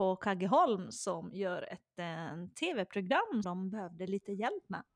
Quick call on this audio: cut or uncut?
cut